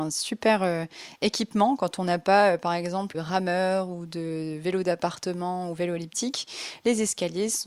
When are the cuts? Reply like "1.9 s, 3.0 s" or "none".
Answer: 3.1 s